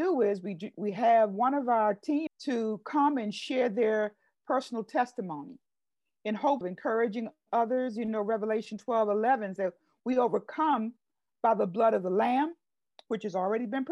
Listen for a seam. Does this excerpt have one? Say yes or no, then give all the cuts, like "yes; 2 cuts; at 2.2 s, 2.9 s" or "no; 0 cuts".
yes; 3 cuts; at 2.3 s, 6.6 s, 9.6 s